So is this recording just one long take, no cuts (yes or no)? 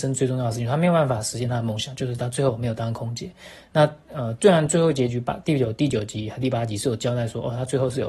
no